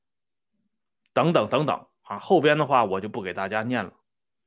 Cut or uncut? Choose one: uncut